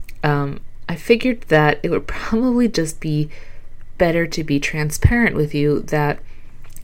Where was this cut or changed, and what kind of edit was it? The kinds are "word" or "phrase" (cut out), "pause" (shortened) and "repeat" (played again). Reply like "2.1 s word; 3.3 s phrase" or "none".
none